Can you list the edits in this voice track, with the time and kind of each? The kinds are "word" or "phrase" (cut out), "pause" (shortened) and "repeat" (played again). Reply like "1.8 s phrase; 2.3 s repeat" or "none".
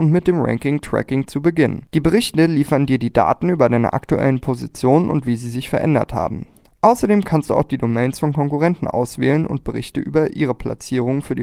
none